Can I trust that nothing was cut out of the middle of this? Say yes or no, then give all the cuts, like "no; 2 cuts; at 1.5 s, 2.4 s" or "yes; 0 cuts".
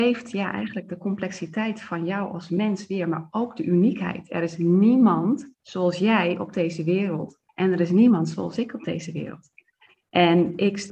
no; 2 cuts; at 5.5 s, 7.5 s